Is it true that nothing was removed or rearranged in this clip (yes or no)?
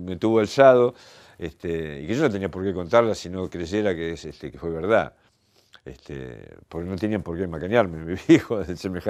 yes